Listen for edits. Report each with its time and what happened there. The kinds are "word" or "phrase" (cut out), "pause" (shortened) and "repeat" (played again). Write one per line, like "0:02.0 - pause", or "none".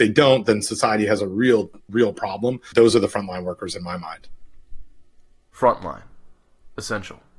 none